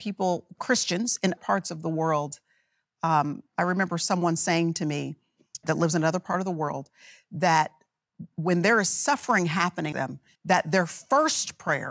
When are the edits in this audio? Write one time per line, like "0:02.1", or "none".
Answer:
0:01.4
0:05.6
0:09.9
0:10.3